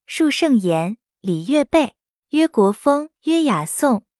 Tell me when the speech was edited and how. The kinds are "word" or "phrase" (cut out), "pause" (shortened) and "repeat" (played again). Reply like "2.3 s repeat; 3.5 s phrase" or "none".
2.2 s pause; 3.2 s pause